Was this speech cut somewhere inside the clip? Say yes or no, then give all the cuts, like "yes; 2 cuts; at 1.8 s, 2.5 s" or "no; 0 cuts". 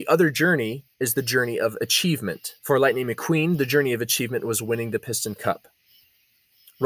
yes; 2 cuts; at 0.9 s, 2.6 s